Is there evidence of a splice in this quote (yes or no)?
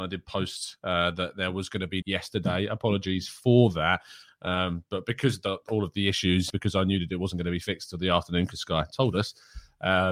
yes